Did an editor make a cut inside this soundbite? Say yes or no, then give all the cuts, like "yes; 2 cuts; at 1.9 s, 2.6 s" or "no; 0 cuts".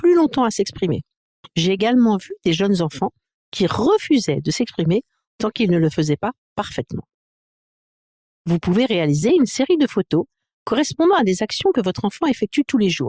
no; 0 cuts